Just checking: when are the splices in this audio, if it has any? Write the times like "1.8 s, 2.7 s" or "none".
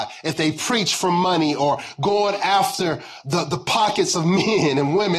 none